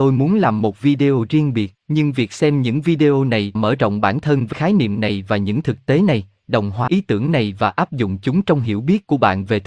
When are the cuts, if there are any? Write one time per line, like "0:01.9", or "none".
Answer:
0:01.8
0:03.5
0:04.5
0:06.9